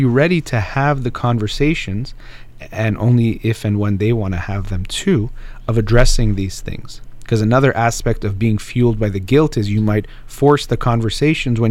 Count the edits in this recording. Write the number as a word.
zero